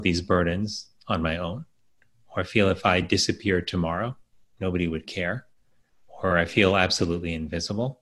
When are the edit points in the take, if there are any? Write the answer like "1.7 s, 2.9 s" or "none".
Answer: none